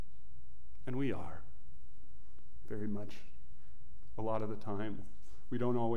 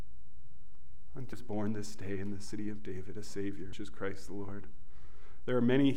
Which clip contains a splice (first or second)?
second